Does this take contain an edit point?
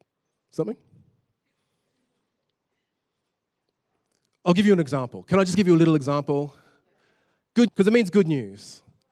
yes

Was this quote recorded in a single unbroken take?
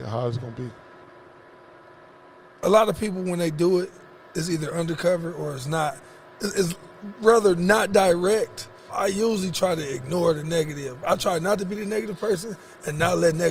no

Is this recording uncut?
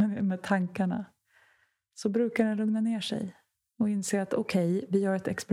yes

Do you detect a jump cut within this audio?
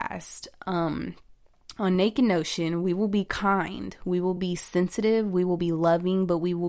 no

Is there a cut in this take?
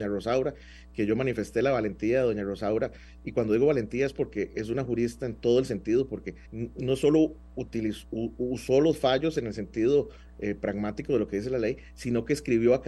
yes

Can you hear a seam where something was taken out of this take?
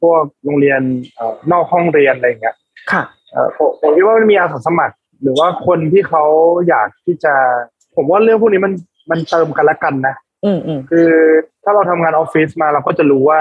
no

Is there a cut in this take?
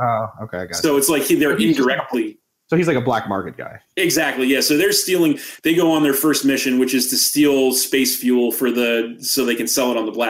no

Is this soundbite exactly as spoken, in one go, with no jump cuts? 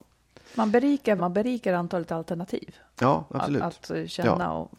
no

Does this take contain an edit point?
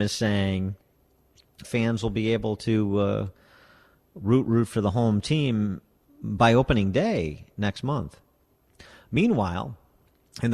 yes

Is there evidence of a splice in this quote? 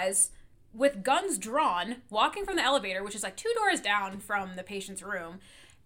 no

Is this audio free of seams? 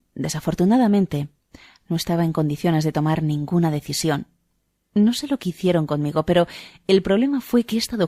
yes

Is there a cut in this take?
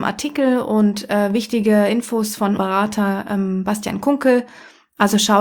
yes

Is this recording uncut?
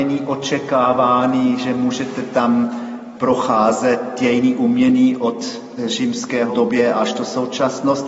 yes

